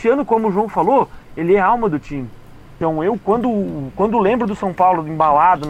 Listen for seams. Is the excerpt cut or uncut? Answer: uncut